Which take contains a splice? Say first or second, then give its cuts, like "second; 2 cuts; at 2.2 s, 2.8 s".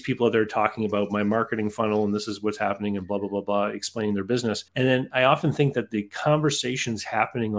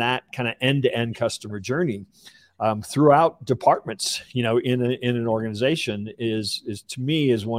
first; 1 cut; at 4.7 s